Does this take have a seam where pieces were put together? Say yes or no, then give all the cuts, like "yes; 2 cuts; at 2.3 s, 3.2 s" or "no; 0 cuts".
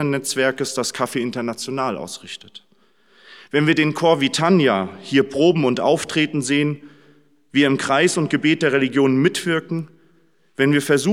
no; 0 cuts